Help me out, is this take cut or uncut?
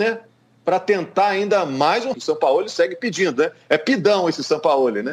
cut